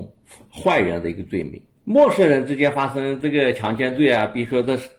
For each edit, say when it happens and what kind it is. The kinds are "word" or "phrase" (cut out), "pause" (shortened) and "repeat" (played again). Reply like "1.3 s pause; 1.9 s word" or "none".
1.7 s pause